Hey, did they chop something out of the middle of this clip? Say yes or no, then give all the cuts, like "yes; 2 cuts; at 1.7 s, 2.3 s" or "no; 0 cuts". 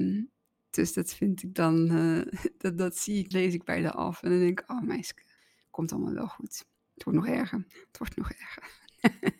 yes; 3 cuts; at 3.3 s, 5.4 s, 6.8 s